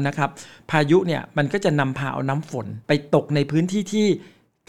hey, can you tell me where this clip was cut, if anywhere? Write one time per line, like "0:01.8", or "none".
0:02.8